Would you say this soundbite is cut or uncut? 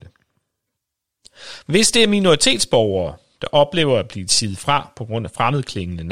uncut